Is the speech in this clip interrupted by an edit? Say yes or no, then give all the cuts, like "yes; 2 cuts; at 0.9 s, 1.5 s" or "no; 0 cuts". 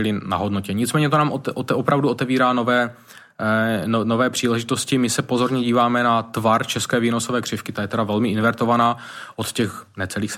no; 0 cuts